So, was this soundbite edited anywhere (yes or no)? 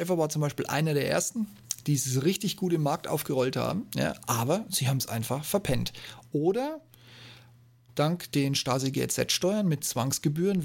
no